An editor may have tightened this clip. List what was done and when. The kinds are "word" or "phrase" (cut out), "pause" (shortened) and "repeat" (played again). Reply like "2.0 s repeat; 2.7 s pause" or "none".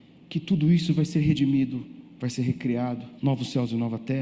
3.2 s pause